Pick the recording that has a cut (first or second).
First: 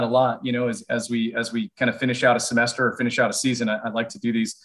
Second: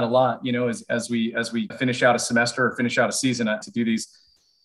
second